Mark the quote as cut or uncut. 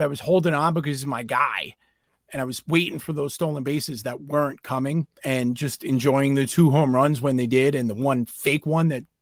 cut